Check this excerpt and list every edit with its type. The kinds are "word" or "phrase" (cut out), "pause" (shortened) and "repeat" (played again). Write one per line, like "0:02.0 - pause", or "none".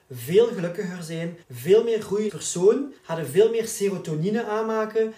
0:01.4 - pause
0:02.3 - word
0:03.0 - pause